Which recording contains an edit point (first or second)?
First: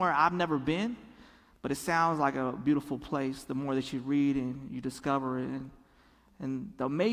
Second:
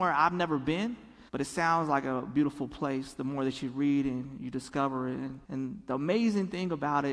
second